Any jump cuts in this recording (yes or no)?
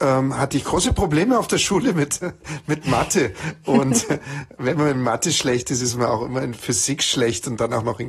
no